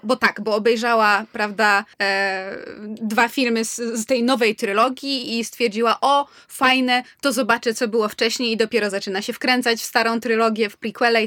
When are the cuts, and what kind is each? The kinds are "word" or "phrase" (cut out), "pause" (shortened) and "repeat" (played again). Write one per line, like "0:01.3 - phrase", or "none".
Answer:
0:01.9 - pause